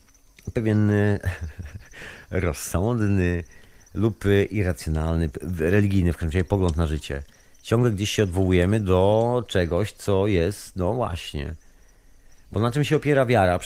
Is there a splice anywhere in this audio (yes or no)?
no